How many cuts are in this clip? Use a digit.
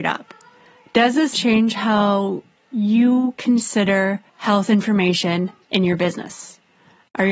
4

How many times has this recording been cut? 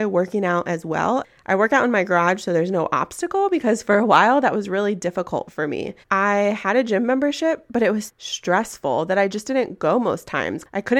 2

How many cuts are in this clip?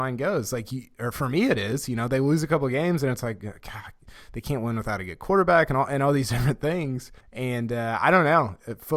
1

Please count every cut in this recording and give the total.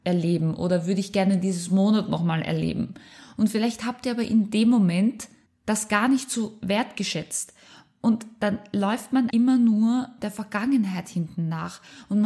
2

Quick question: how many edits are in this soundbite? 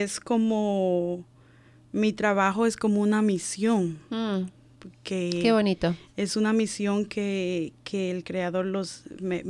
0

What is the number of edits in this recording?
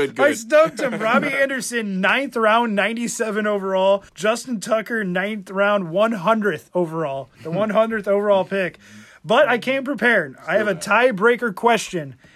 2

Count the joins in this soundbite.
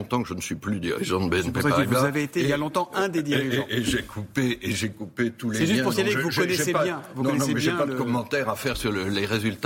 0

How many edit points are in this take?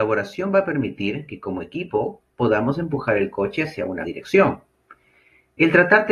1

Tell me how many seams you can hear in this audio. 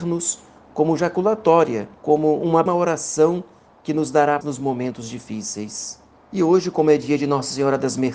4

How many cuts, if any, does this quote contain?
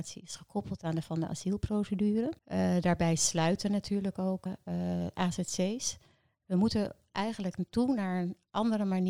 3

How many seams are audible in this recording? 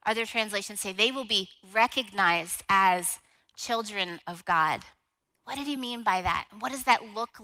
0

